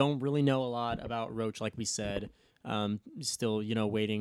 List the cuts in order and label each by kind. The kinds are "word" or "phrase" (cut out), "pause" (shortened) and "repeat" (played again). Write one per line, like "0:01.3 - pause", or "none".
none